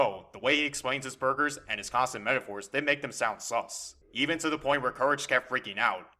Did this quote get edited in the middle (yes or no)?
no